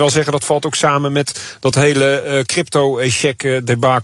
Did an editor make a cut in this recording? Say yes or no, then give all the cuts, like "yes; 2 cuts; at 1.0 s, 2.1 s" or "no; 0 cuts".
no; 0 cuts